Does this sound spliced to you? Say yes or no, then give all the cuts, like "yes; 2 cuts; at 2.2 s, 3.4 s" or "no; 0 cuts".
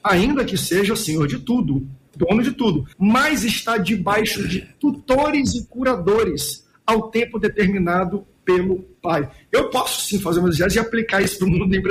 yes; 1 cut; at 2.9 s